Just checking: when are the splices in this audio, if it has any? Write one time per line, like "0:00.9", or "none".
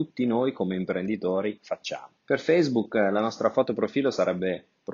0:02.2